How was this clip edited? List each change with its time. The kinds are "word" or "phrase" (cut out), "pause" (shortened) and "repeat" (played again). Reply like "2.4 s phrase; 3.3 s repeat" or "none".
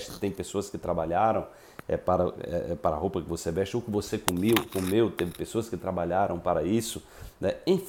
none